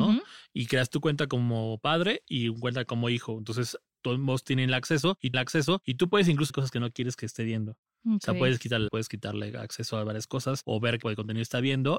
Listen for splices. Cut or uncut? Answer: cut